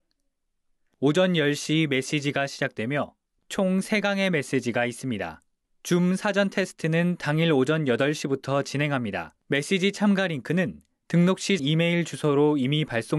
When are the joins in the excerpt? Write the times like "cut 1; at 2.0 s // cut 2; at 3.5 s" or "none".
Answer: cut 1; at 5.6 s // cut 2; at 9.4 s // cut 3; at 11.6 s